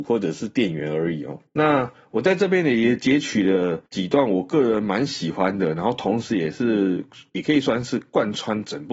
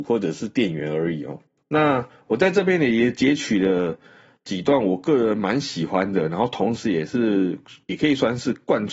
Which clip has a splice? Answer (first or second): first